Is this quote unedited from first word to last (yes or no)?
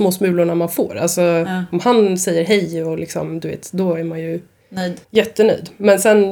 no